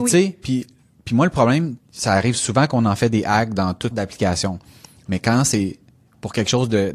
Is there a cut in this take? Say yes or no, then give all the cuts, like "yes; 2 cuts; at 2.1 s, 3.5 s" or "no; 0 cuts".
yes; 2 cuts; at 1.8 s, 3.9 s